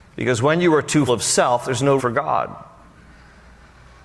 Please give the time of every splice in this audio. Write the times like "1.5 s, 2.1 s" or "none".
1.1 s, 2.0 s